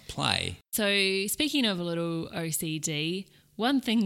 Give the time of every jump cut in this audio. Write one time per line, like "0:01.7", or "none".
none